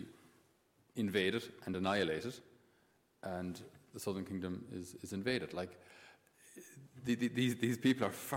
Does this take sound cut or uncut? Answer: uncut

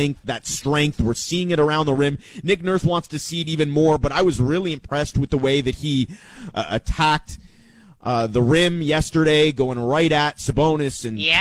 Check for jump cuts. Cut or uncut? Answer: uncut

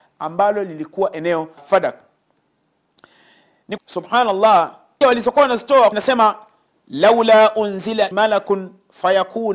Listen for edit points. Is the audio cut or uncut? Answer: cut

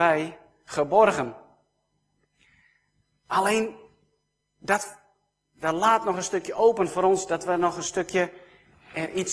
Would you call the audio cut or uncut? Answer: uncut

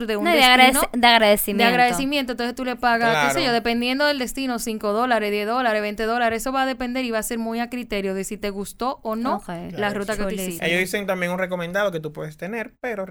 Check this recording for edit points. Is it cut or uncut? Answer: uncut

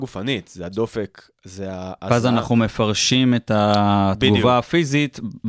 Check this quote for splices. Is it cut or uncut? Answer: uncut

